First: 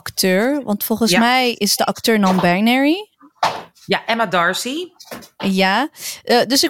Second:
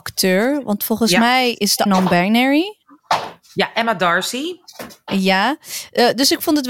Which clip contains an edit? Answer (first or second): second